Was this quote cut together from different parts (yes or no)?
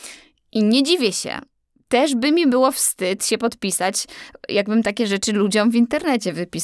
no